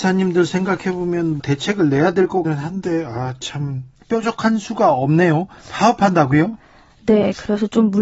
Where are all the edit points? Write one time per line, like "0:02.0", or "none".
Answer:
0:01.4
0:02.4